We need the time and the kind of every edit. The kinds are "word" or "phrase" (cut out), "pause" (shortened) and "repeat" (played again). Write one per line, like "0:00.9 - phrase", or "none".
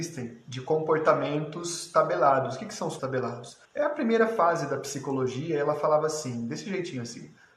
0:03.0 - word
0:03.6 - pause